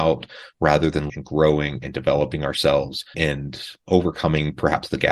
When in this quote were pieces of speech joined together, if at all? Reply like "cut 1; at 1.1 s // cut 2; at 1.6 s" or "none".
cut 1; at 1.1 s // cut 2; at 3.1 s